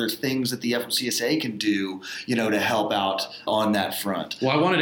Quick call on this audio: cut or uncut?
cut